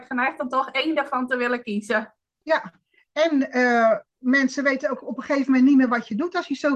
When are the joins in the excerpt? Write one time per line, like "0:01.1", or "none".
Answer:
none

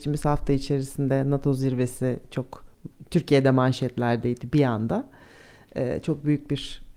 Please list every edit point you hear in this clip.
none

